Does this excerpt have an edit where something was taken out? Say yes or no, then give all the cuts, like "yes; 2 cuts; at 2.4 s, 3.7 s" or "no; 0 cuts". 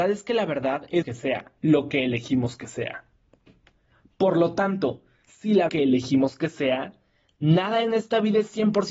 yes; 3 cuts; at 1.0 s, 1.6 s, 5.7 s